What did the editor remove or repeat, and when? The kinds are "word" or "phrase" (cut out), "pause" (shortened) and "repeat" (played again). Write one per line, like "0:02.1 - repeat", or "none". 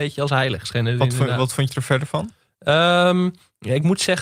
0:02.4 - pause